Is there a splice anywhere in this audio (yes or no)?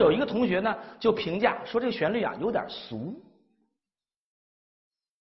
no